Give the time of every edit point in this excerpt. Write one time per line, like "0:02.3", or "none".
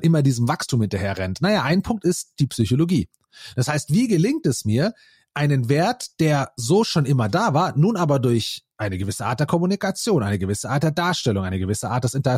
none